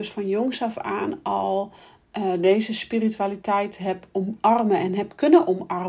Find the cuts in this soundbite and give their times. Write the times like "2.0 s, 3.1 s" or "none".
none